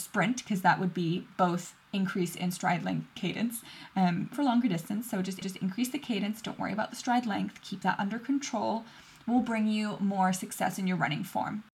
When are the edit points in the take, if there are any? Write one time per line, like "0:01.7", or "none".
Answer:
0:01.8
0:03.2
0:04.3
0:05.4